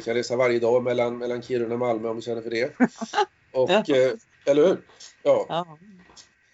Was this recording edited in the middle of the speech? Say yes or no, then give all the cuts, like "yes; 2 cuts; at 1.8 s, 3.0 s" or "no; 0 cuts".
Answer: yes; 1 cut; at 5.2 s